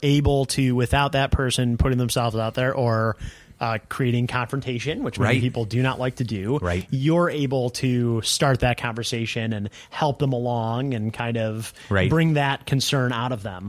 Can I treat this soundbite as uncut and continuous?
yes; 0 cuts

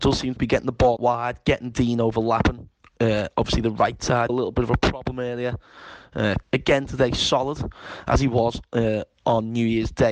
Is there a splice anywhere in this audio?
yes; 3 cuts; at 1.0 s, 4.3 s, 6.4 s

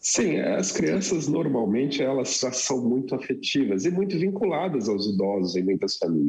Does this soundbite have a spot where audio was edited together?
no; 0 cuts

